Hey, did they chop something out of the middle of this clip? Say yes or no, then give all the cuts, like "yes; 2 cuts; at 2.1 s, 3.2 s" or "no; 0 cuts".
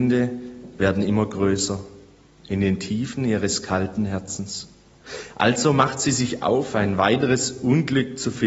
no; 0 cuts